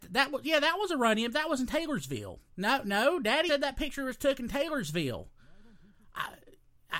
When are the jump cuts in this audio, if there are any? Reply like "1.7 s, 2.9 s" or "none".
2.5 s, 3.5 s